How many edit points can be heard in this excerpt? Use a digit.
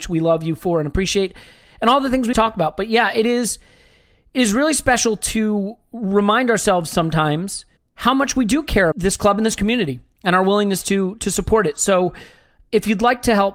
3